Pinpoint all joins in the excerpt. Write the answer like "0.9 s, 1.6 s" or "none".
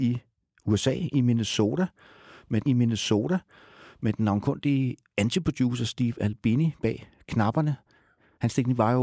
2.7 s